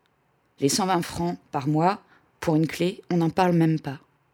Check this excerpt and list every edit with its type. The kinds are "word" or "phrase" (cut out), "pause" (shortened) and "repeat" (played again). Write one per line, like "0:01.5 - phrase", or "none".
none